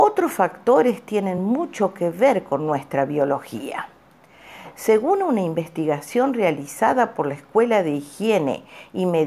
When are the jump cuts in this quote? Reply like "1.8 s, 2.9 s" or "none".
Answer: none